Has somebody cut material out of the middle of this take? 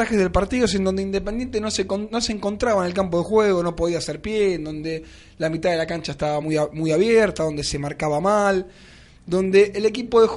no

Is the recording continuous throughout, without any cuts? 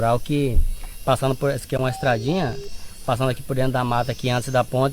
yes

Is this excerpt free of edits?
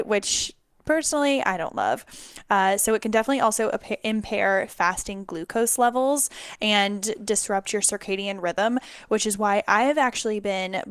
yes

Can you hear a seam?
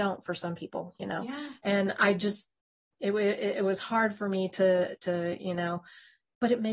no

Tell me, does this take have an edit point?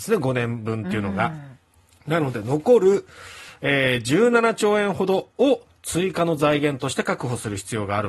yes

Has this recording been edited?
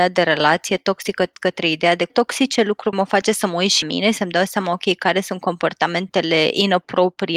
yes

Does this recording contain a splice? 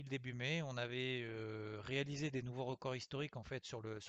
no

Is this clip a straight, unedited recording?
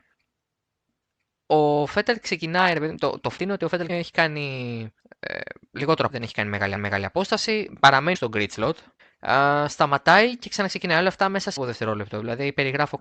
no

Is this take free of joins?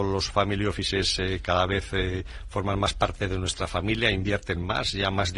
yes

